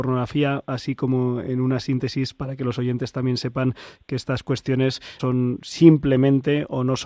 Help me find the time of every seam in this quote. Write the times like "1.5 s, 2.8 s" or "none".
5.2 s

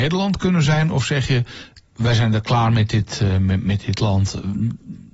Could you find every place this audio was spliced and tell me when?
none

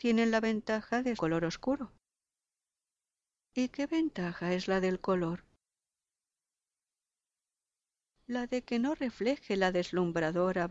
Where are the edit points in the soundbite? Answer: 1.2 s, 2.3 s

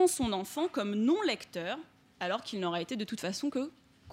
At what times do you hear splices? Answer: 2.0 s

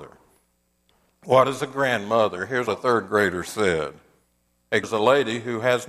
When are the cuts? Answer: 2.7 s, 4.8 s

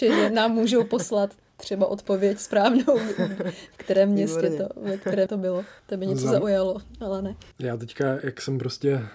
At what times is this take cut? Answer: 5.3 s, 5.8 s, 7.5 s

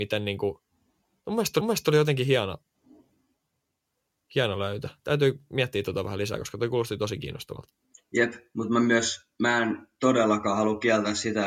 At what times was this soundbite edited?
1.6 s

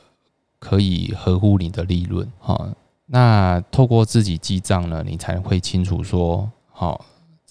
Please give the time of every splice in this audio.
2.4 s

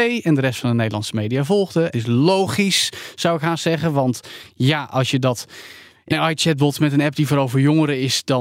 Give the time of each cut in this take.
1.9 s, 6.1 s

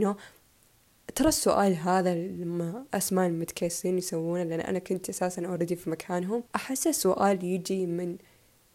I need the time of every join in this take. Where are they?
6.5 s

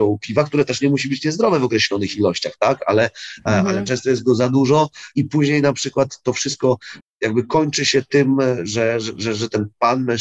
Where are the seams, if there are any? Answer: none

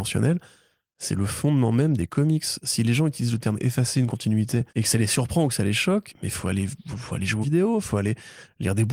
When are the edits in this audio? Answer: 4.7 s, 6.1 s, 7.4 s

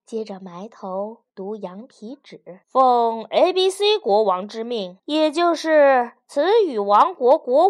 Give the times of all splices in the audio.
1.3 s, 2.6 s, 5.0 s

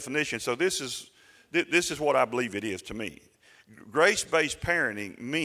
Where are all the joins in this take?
none

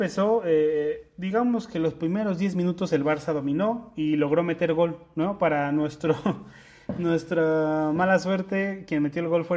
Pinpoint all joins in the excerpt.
none

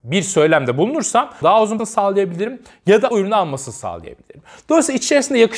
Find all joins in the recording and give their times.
1.4 s, 1.8 s, 3.1 s

